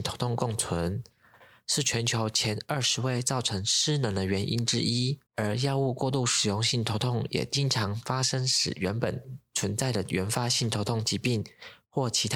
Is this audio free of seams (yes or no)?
no